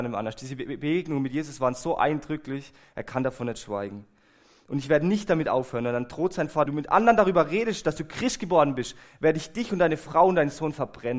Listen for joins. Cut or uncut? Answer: cut